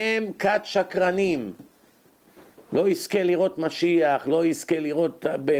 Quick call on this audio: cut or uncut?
uncut